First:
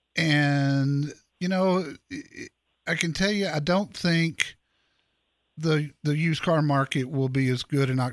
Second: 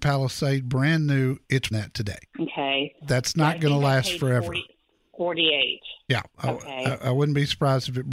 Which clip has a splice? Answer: second; 2 cuts; at 1.7 s, 2.3 s

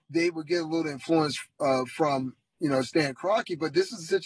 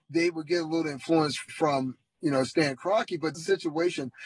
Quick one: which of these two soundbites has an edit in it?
second; 2 cuts; at 1.5 s, 3.3 s

